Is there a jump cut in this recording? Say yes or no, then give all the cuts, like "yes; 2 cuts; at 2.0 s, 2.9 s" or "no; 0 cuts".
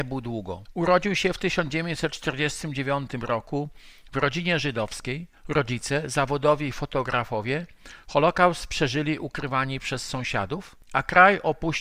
yes; 1 cut; at 5.4 s